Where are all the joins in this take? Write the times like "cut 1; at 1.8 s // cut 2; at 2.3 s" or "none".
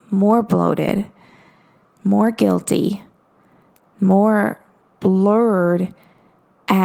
none